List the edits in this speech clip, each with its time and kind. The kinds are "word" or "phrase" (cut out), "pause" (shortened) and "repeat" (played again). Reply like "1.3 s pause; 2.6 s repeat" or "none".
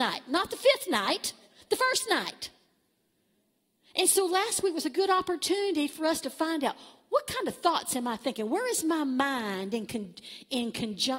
none